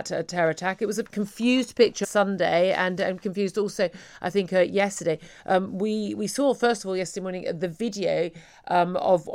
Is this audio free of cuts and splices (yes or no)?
no